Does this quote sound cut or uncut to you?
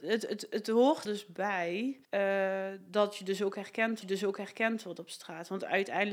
cut